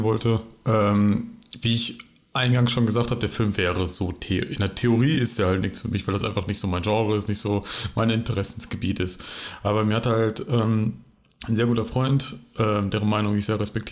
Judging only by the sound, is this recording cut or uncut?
uncut